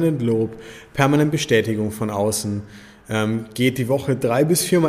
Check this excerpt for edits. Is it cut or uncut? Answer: uncut